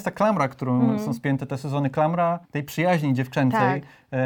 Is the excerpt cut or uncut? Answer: cut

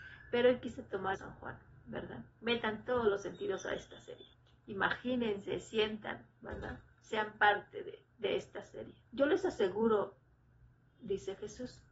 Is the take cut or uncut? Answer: cut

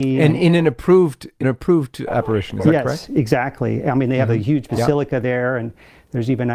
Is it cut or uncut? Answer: cut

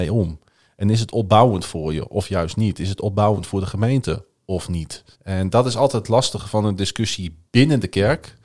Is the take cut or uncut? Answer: cut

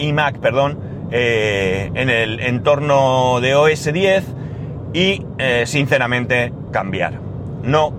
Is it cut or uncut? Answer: cut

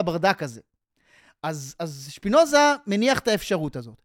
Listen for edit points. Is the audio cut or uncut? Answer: uncut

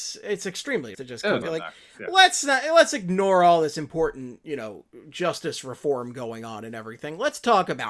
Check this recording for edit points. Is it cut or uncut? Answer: cut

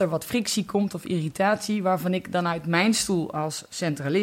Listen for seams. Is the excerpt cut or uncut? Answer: uncut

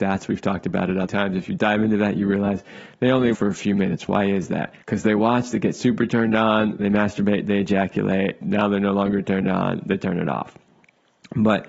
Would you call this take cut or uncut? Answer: cut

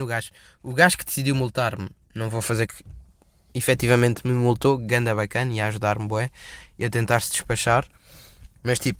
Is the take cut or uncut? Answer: cut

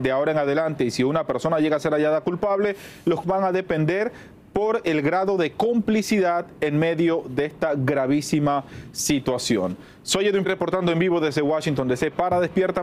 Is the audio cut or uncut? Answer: cut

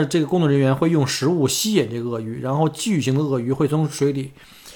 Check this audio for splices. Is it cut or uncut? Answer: uncut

